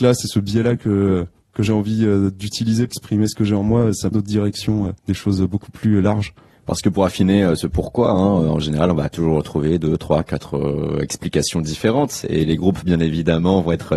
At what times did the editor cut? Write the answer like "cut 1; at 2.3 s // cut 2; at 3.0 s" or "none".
cut 1; at 2.9 s // cut 2; at 4.1 s // cut 3; at 5.0 s